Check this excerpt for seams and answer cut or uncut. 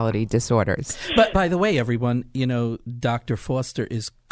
cut